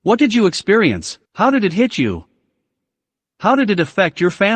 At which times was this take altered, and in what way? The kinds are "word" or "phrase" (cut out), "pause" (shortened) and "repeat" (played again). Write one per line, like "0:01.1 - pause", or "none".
0:01.3 - pause